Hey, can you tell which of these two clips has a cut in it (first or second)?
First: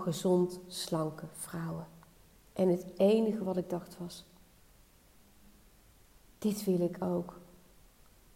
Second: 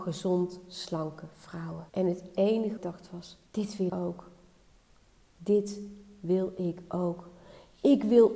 second